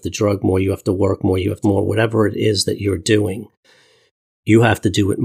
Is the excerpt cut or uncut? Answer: cut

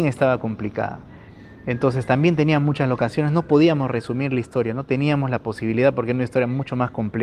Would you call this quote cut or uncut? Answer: uncut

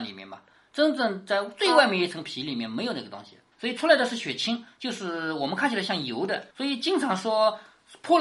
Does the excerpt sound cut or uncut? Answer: cut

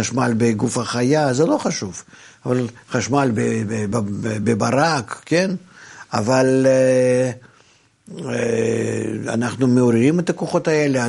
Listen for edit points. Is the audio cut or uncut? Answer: uncut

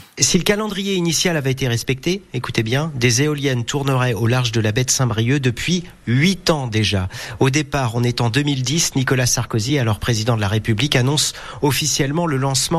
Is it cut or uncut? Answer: uncut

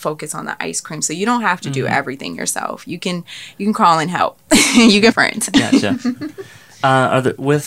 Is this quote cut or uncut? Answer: cut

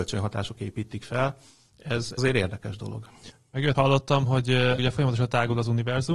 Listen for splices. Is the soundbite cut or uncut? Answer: cut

